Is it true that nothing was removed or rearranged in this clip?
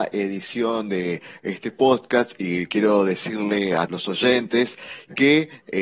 no; 1 cut; at 3.9 s

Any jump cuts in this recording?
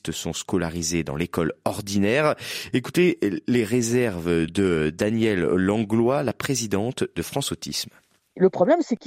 no; 0 cuts

